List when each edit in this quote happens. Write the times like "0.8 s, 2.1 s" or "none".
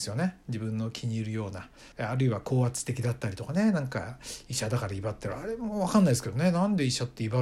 1.9 s

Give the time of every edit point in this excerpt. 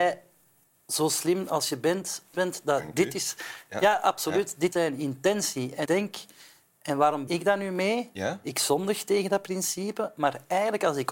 2.3 s, 4.7 s, 5.8 s, 7.3 s

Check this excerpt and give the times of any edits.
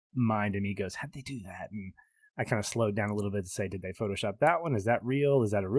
none

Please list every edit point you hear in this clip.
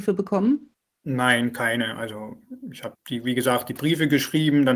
2.9 s

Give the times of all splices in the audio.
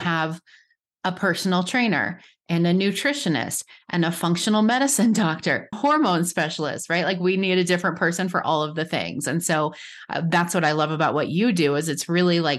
5.7 s

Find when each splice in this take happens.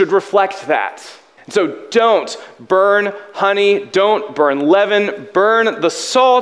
1.4 s

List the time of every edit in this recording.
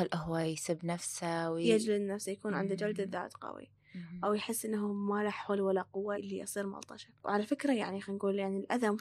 6.1 s

